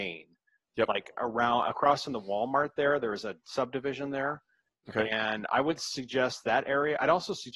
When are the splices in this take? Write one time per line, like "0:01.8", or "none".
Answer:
none